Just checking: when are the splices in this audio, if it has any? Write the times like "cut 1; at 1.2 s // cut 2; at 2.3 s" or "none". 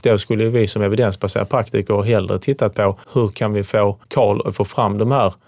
cut 1; at 3.0 s // cut 2; at 4.0 s